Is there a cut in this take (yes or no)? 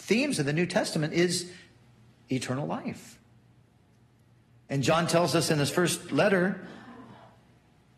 no